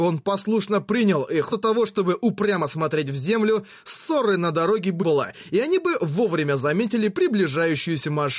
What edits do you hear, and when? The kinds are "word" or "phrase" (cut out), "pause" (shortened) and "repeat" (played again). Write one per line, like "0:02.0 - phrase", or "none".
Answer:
0:01.5 - word
0:05.0 - word